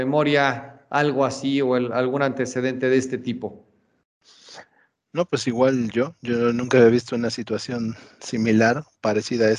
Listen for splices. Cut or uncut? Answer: uncut